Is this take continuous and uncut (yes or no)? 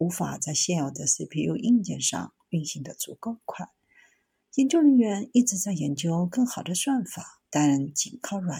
no